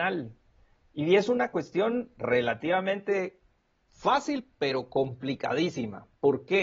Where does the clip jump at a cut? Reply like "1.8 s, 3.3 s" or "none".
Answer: none